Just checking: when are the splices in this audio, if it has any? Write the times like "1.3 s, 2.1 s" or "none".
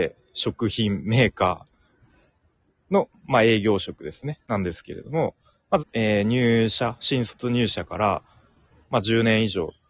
5.8 s